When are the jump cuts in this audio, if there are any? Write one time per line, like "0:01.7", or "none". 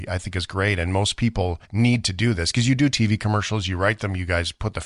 0:01.6